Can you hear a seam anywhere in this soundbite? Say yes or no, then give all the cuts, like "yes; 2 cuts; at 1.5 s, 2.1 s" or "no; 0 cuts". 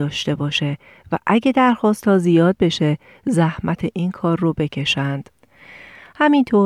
no; 0 cuts